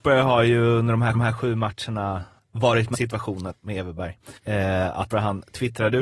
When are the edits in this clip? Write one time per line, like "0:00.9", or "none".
0:01.1
0:02.4
0:02.9
0:03.5
0:04.4
0:05.1